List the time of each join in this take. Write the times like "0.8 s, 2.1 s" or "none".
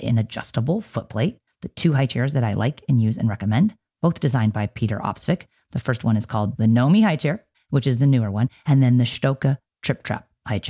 none